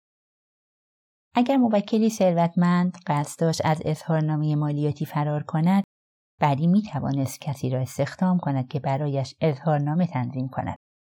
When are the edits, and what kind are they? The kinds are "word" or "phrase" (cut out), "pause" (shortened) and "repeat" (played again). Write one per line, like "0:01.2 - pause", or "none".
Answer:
none